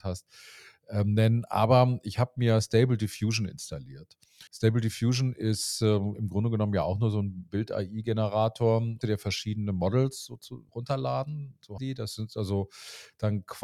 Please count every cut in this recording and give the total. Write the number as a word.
four